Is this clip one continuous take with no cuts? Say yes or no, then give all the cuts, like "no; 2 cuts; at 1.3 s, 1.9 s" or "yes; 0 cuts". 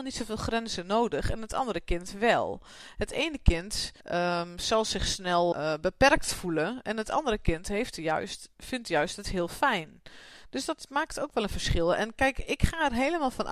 no; 2 cuts; at 4.0 s, 5.5 s